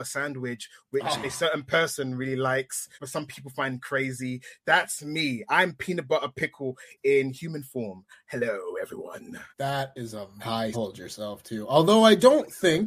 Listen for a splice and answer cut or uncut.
cut